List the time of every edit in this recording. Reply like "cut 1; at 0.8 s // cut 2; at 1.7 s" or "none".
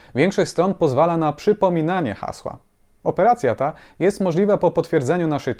none